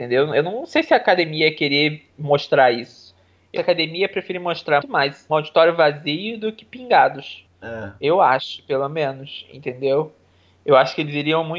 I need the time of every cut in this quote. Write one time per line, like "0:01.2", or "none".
0:03.6
0:04.8
0:05.3
0:07.5